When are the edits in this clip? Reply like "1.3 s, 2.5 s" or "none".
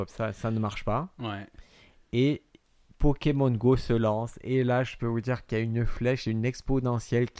none